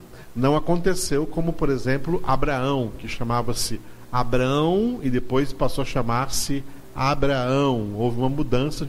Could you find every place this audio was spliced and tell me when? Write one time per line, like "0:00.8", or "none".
none